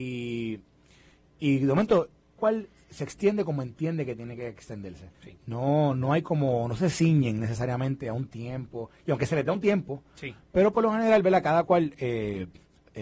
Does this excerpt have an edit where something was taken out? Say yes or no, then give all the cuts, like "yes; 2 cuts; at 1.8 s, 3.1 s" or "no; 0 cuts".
yes; 2 cuts; at 2.4 s, 5.1 s